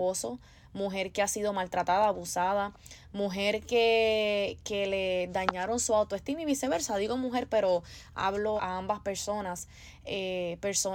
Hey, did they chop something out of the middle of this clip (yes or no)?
yes